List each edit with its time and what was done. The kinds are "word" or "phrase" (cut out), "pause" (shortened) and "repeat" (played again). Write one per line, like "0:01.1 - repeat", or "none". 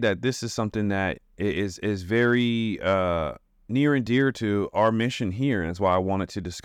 none